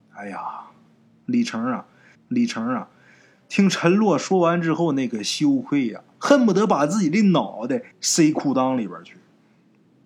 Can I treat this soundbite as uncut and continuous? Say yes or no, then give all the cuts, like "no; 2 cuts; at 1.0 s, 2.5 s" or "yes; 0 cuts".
no; 2 cuts; at 2.1 s, 7.9 s